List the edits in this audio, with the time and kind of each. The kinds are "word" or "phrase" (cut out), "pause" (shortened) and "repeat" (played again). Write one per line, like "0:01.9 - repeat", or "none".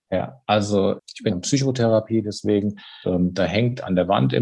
0:01.0 - word
0:01.3 - word
0:03.0 - word